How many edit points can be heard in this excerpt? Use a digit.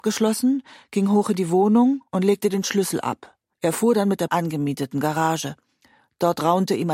2